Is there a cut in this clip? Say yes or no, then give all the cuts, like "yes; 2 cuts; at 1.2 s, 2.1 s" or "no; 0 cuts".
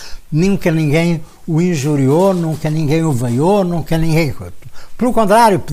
no; 0 cuts